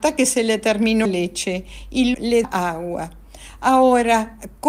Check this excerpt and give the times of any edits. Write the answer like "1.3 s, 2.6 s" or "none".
1.0 s, 2.1 s, 2.4 s